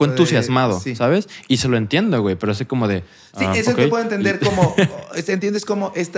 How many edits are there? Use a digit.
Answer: 0